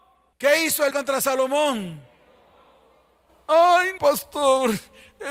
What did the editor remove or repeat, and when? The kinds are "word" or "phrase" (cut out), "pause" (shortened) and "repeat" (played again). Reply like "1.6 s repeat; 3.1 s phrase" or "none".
0.9 s word; 4.0 s word